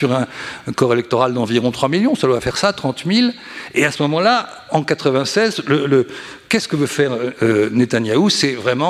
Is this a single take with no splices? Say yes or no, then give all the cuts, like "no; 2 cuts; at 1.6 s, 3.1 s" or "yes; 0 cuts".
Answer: yes; 0 cuts